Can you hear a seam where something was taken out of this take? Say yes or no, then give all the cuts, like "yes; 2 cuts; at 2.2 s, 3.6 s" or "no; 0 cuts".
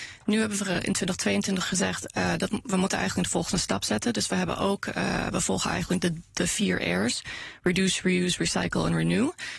no; 0 cuts